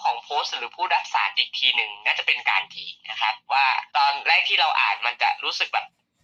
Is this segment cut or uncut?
cut